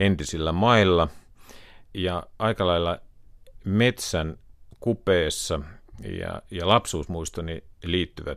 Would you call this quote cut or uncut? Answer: cut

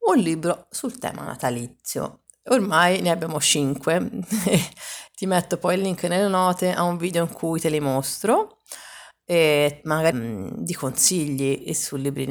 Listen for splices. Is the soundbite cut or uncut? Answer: cut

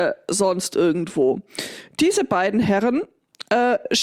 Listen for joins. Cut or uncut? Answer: uncut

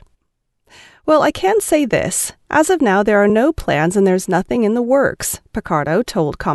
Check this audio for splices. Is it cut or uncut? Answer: uncut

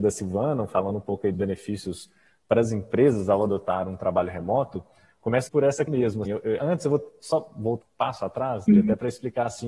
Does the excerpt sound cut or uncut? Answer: cut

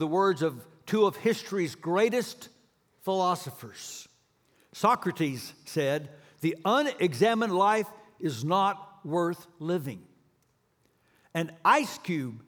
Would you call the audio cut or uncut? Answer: uncut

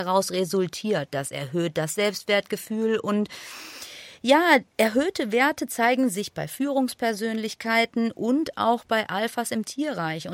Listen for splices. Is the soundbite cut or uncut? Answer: uncut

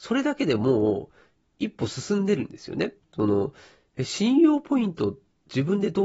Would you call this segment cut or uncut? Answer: uncut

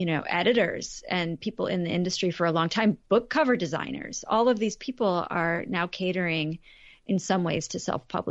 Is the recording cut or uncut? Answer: uncut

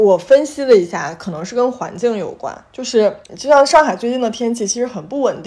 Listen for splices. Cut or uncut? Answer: cut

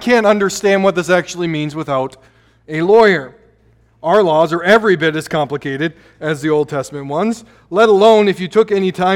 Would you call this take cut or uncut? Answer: uncut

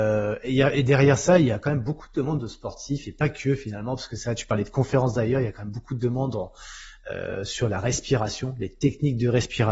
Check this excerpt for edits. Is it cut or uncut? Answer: uncut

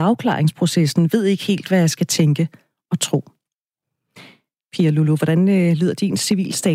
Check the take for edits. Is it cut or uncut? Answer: uncut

